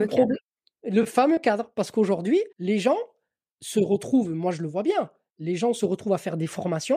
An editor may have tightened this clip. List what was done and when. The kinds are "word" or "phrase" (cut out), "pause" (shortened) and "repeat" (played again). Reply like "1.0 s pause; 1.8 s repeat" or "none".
2.5 s pause